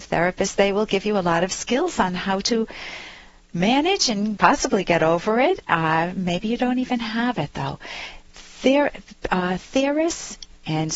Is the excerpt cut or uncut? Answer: uncut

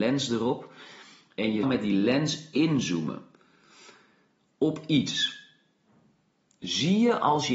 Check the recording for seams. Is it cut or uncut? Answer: cut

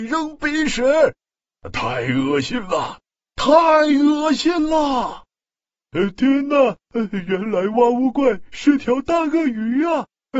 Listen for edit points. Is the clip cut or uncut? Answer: uncut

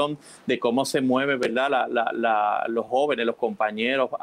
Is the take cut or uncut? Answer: uncut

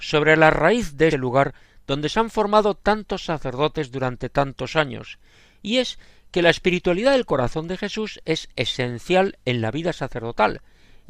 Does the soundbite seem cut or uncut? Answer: cut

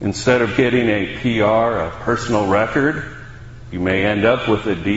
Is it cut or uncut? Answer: uncut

